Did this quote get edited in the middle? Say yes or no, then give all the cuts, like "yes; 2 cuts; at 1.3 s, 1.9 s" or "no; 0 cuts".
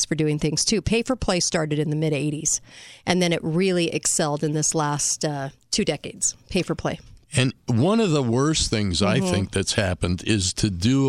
yes; 1 cut; at 7.2 s